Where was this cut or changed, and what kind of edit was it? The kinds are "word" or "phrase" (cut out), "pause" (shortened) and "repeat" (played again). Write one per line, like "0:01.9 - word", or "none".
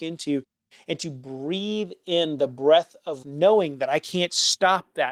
0:03.2 - word